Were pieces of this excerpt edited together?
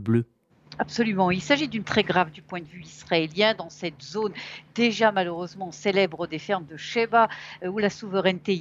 yes; 1 cut; at 1.8 s

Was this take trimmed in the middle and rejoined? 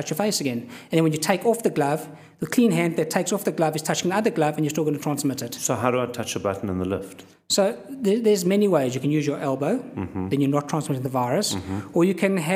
no; 0 cuts

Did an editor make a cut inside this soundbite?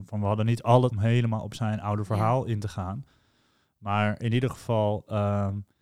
yes; 1 cut; at 0.9 s

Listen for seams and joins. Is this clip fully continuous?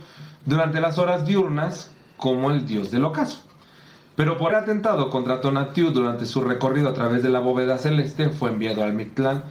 no; 1 cut; at 4.5 s

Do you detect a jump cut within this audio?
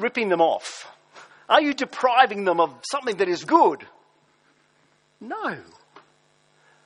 yes; 2 cuts; at 1.3 s, 3.4 s

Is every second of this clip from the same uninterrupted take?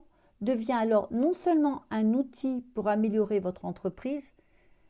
yes; 0 cuts

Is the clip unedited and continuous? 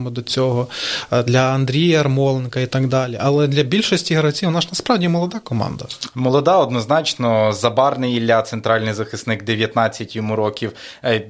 yes; 0 cuts

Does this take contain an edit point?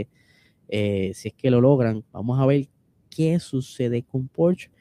yes; 1 cut; at 2.1 s

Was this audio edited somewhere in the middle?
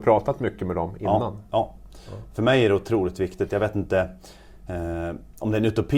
no; 0 cuts

